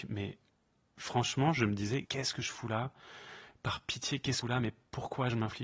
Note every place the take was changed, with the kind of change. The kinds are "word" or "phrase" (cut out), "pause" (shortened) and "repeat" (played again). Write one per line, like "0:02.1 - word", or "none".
0:02.1 - word
0:04.4 - phrase